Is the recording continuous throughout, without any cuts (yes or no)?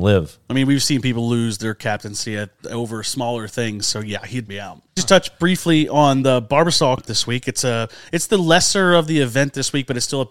no